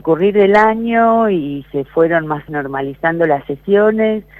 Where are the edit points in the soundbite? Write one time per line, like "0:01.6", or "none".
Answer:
0:02.5